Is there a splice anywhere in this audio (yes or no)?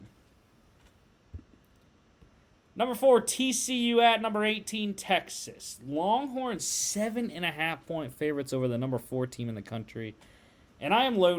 no